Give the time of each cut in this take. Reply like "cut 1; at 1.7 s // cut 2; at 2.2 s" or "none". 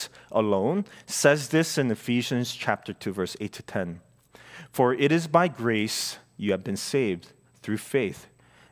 none